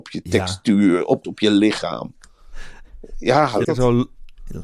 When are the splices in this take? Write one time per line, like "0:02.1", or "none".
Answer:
0:01.2
0:03.6